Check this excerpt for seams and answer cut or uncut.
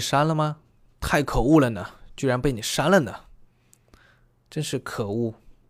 uncut